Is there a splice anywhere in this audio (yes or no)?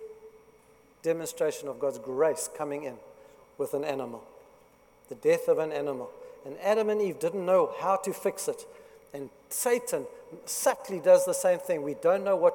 no